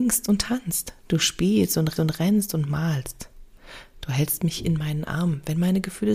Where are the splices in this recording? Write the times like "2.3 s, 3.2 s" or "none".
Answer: 2.0 s